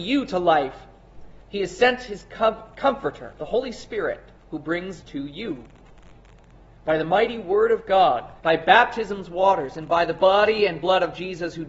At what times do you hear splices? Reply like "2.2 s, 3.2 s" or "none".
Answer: 1.4 s, 3.4 s, 4.4 s, 5.0 s, 8.4 s